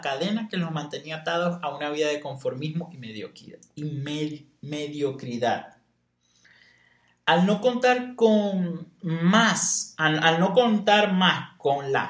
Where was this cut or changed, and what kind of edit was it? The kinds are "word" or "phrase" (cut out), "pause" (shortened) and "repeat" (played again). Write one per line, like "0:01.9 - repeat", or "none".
none